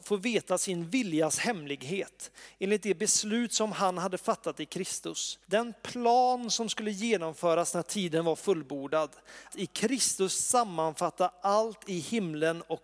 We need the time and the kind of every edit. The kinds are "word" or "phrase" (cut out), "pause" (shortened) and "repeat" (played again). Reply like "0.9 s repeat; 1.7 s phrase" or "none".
5.4 s pause; 9.5 s word